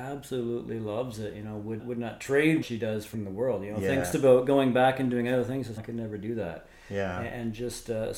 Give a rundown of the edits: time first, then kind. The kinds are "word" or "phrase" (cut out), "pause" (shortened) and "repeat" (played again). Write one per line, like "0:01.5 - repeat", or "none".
0:01.8 - word
0:02.6 - word
0:03.1 - word
0:04.1 - word
0:05.8 - word